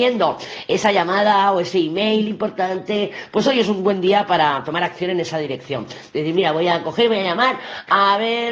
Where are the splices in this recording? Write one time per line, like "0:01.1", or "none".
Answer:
none